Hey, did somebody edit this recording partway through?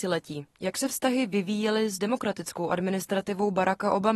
no; 0 cuts

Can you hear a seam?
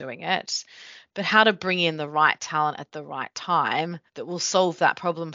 yes; 1 cut; at 4.1 s

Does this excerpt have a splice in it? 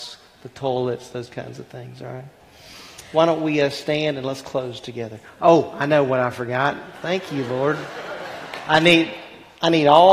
no; 0 cuts

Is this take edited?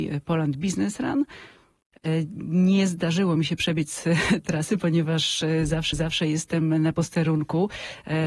yes; 2 cuts; at 4.4 s, 5.9 s

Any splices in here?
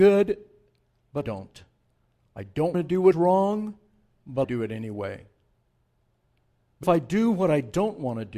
yes; 5 cuts; at 1.2 s, 2.7 s, 3.1 s, 4.4 s, 6.8 s

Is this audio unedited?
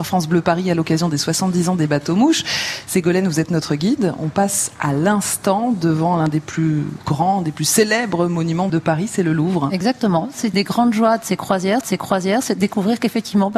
no; 3 cuts; at 8.7 s, 10.5 s, 11.8 s

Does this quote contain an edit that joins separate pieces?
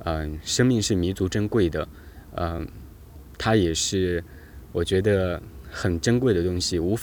no; 0 cuts

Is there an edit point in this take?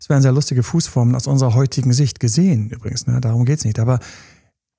no; 0 cuts

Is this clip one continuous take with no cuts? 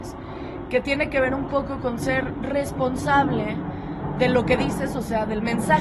yes; 0 cuts

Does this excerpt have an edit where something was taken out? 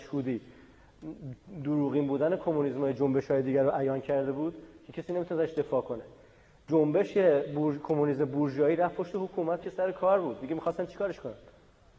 yes; 1 cut; at 9.6 s

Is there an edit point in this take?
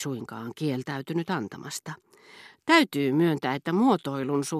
no; 0 cuts

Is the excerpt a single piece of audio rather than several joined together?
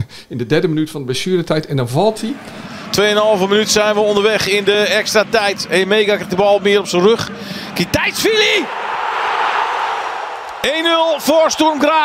yes; 0 cuts

